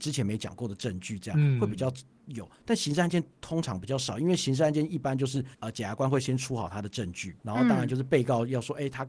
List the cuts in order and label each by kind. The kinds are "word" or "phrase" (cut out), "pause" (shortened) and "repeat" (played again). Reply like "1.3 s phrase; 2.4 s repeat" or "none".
5.5 s pause; 7.4 s pause